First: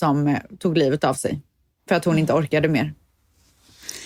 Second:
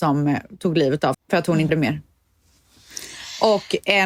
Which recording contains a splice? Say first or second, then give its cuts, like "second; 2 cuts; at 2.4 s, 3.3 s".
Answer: second; 2 cuts; at 1.1 s, 1.7 s